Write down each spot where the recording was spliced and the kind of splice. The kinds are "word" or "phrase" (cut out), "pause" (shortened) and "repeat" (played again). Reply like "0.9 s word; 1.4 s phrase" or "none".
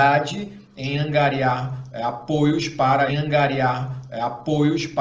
3.1 s repeat